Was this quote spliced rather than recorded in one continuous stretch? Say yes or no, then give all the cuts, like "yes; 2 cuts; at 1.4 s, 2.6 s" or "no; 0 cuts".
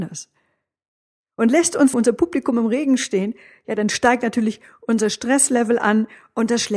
yes; 1 cut; at 1.9 s